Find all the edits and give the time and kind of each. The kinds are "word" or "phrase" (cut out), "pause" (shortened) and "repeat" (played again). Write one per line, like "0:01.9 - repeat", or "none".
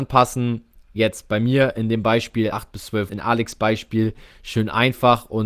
0:02.5 - phrase
0:03.1 - word